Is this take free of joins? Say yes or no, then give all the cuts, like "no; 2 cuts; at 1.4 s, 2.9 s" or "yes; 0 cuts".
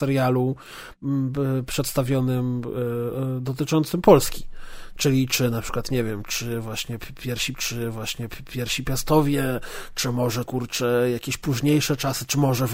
no; 2 cuts; at 7.5 s, 10.5 s